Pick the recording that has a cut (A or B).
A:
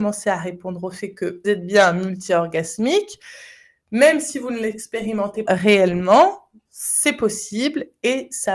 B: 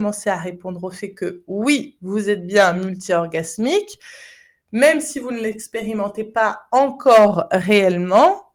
A